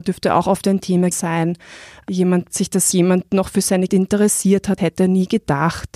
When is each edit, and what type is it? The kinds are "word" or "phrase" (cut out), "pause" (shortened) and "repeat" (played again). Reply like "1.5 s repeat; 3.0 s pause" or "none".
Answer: 1.1 s word; 2.5 s word; 2.9 s word; 3.9 s word; 4.8 s word